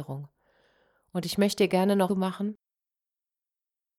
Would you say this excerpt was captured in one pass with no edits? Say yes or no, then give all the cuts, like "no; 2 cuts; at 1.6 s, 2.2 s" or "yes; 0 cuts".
no; 1 cut; at 2.1 s